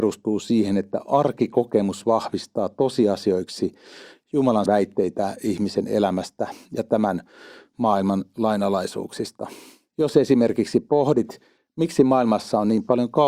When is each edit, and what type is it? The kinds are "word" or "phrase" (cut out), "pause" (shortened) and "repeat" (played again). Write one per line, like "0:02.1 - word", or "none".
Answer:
0:04.7 - word